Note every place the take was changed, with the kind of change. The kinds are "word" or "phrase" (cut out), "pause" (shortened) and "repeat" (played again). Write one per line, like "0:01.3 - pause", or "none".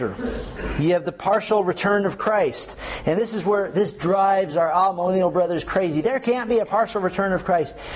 none